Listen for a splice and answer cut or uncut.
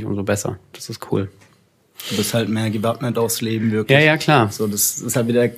uncut